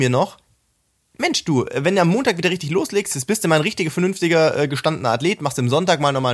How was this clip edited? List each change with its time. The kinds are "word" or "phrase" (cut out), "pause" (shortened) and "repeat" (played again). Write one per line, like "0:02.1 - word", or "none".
none